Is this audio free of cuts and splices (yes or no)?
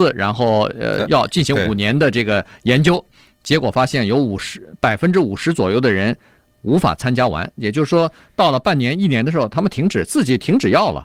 yes